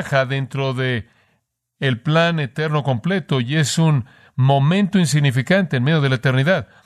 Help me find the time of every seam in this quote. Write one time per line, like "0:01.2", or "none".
none